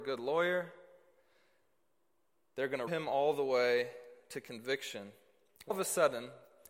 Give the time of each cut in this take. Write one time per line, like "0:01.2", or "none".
0:02.9
0:05.7